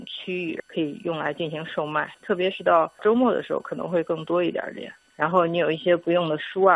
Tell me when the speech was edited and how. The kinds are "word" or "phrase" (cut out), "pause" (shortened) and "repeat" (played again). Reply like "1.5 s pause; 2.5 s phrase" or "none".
2.1 s pause